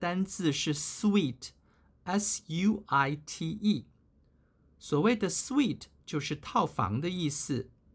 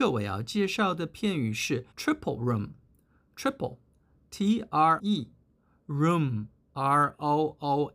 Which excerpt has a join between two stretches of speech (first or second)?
second